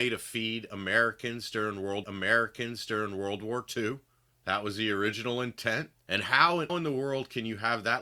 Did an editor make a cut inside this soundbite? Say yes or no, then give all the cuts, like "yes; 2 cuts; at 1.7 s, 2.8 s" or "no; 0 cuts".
yes; 4 cuts; at 2.0 s, 4.3 s, 6.0 s, 6.7 s